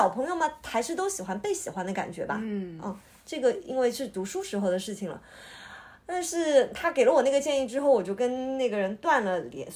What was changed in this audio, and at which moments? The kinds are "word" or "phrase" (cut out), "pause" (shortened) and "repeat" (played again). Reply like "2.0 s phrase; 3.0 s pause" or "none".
none